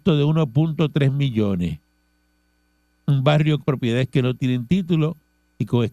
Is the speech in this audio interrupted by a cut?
yes; 1 cut; at 3.6 s

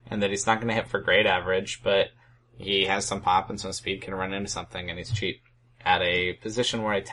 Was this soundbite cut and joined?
no; 0 cuts

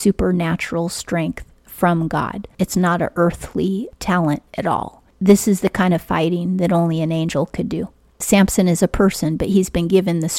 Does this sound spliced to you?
no; 0 cuts

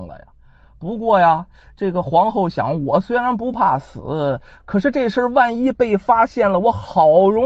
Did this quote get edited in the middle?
no; 0 cuts

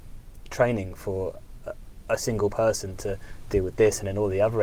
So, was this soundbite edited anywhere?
no; 0 cuts

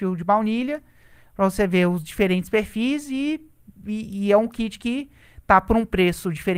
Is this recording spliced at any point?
no; 0 cuts

